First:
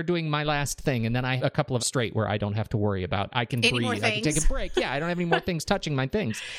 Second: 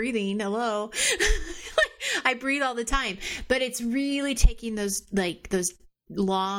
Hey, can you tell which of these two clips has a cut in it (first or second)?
first